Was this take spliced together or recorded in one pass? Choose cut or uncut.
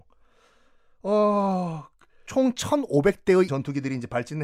cut